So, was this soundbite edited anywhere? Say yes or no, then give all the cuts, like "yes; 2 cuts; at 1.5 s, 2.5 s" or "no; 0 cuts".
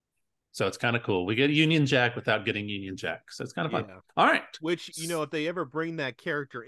yes; 1 cut; at 4.1 s